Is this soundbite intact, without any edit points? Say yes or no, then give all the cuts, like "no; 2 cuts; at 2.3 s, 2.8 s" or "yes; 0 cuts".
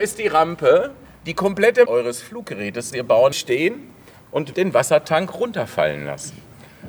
no; 5 cuts; at 1.0 s, 1.8 s, 2.9 s, 3.3 s, 4.5 s